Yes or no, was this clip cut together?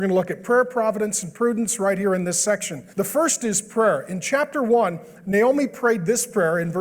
yes